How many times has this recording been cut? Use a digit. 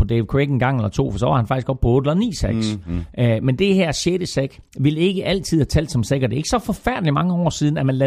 1